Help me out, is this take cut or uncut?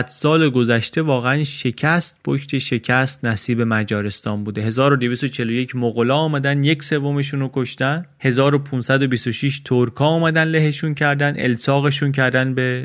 uncut